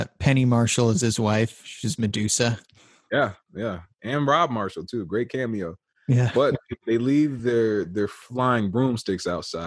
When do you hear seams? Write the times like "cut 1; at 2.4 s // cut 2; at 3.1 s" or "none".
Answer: none